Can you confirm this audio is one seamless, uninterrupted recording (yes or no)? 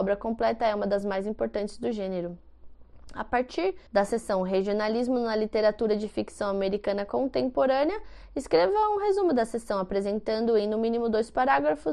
no